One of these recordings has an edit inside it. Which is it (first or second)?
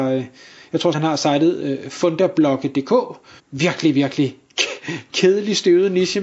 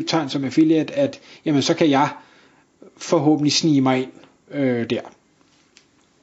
first